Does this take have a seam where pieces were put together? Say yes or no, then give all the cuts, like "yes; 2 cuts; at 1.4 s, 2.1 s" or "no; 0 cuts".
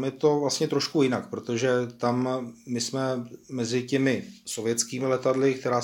no; 0 cuts